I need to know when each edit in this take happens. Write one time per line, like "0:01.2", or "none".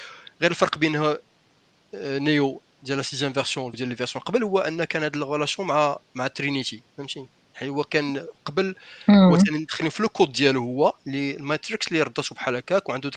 0:03.7